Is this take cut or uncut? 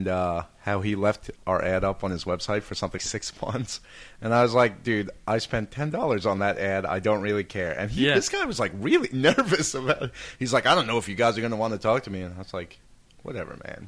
cut